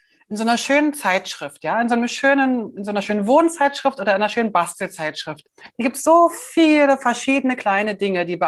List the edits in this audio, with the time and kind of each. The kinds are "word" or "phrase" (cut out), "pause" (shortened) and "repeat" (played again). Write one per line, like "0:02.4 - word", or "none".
0:05.5 - pause